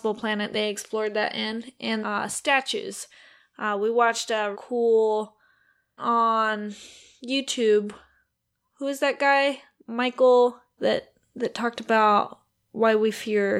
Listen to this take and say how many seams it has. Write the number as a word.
four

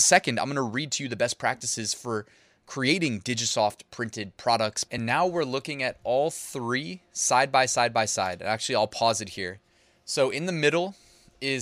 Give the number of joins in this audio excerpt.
zero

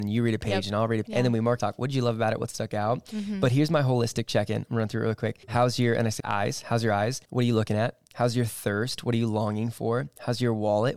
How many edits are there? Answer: five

